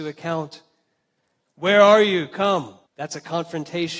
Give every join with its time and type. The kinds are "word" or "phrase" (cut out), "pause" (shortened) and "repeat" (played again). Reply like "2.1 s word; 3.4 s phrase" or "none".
2.9 s pause